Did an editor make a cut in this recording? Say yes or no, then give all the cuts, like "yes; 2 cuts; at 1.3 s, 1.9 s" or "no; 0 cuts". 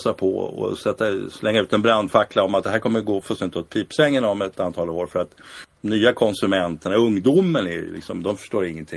no; 0 cuts